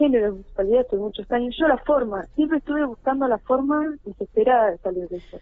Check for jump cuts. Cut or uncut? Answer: cut